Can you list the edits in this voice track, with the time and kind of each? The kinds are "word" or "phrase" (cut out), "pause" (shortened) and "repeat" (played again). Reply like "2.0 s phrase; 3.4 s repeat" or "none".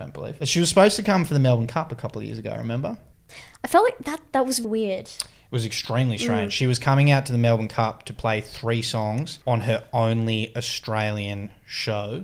4.6 s word; 9.4 s pause